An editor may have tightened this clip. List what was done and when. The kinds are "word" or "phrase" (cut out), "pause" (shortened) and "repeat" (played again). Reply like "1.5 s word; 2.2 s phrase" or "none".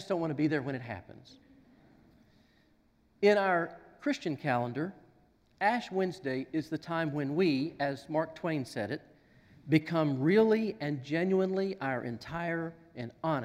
none